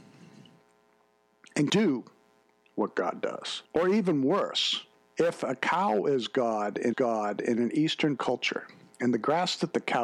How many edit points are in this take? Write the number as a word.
six